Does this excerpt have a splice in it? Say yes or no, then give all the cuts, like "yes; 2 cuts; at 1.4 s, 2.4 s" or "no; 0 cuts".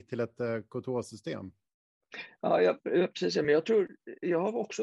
no; 0 cuts